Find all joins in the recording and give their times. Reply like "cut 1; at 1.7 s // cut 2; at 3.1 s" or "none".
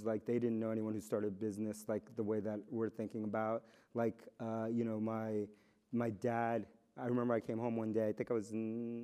cut 1; at 2.7 s